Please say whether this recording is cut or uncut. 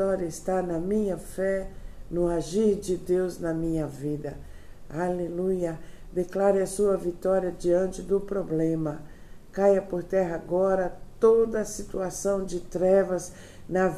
uncut